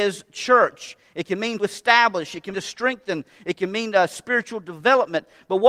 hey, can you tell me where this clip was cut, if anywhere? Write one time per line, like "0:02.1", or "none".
0:01.6
0:02.5

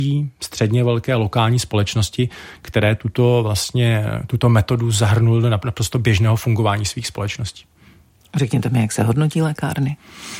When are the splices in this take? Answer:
none

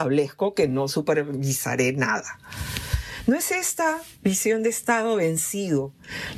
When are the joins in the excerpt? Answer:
none

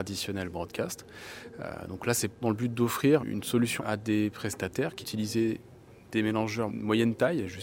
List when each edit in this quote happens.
0:02.4
0:03.2
0:03.8
0:05.0
0:06.7

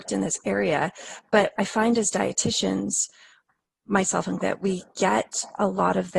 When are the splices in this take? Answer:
0:03.8
0:04.4

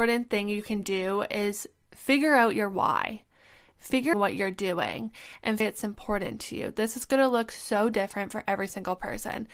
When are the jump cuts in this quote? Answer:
0:04.1
0:05.6

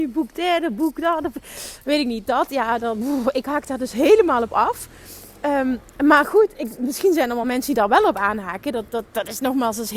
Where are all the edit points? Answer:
none

